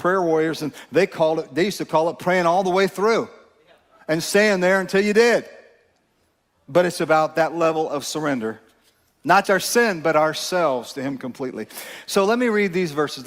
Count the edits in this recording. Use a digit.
1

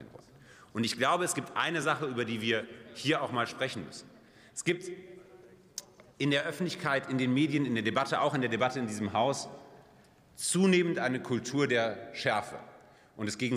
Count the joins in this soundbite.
0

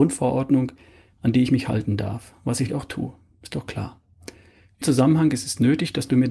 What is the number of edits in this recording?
2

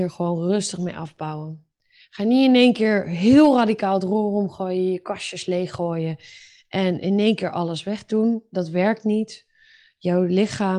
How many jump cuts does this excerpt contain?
0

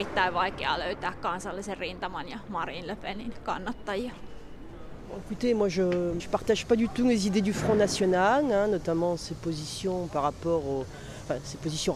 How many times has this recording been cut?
1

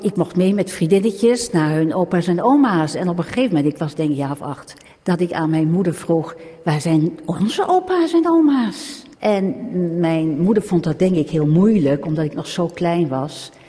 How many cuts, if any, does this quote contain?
2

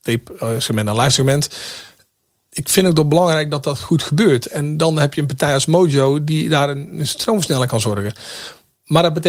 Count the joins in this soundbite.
0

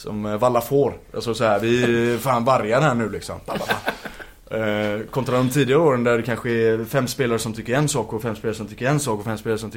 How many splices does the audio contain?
0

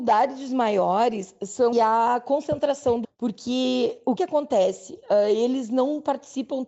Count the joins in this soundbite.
3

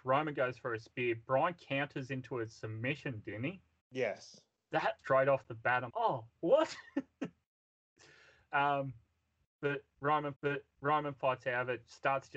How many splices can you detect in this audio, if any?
5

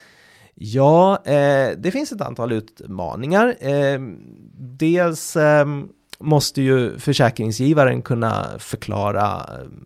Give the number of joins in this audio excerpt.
0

